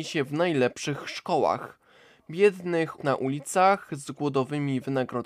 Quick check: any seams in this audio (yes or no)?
yes